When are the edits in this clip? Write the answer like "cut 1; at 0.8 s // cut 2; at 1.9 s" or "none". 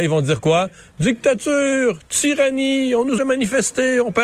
cut 1; at 3.2 s